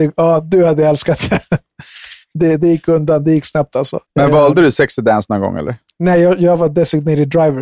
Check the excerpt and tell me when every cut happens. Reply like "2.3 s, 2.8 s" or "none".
4.1 s

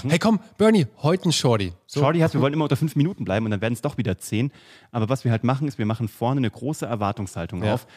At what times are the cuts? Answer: none

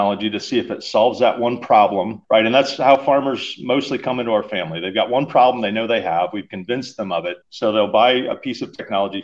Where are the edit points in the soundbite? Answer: 2.2 s, 7.4 s

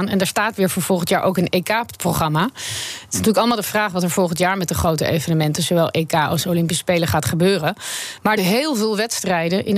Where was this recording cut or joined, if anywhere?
8.4 s

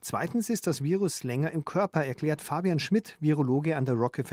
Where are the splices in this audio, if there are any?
none

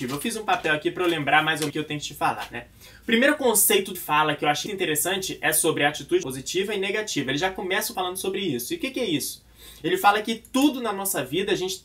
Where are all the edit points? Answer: 1.7 s, 3.9 s, 4.7 s, 6.2 s, 7.9 s

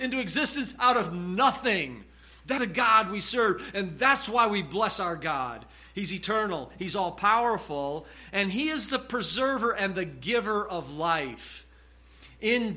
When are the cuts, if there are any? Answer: 2.6 s

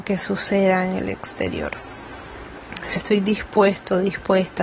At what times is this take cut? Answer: 3.0 s

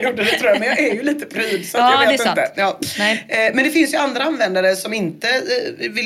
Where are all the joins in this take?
none

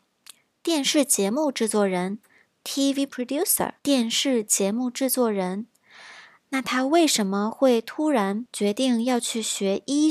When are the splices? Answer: 3.1 s, 3.8 s

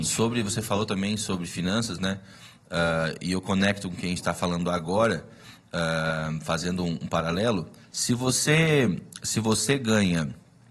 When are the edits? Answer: none

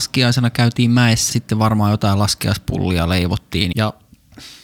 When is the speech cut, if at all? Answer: 1.3 s, 3.7 s

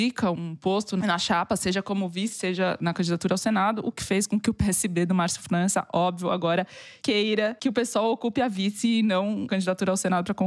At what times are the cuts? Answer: 9.5 s

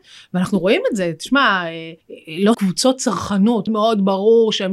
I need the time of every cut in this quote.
2.0 s, 2.5 s, 3.7 s

